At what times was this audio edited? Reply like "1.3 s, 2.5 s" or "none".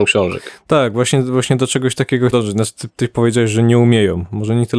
2.3 s